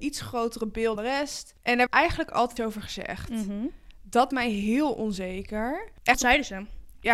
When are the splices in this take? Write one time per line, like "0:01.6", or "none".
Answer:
0:01.0
0:01.9
0:02.6
0:04.3
0:06.1